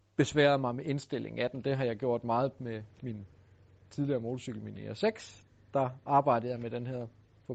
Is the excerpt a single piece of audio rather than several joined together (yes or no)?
yes